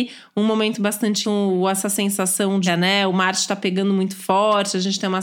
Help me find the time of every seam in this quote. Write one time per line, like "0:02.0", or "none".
0:01.2
0:02.7